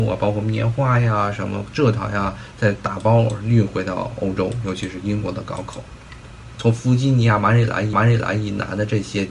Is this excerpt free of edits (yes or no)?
no